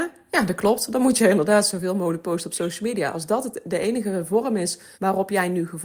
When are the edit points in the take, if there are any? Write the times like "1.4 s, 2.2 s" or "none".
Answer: 4.9 s